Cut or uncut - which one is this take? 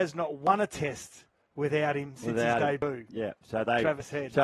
uncut